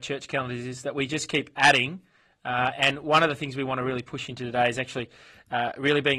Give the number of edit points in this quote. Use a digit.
0